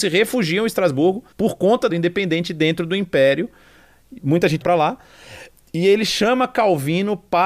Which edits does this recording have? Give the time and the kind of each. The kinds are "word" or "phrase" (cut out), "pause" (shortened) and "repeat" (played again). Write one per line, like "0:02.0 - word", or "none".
0:01.3 - pause
0:01.9 - phrase
0:04.6 - word